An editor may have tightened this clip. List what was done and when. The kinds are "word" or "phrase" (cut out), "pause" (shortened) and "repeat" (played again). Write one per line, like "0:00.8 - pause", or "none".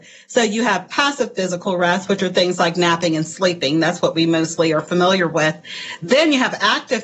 none